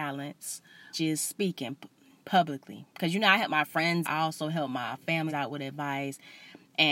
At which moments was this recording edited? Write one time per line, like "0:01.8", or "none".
0:00.9
0:02.9
0:04.0
0:05.3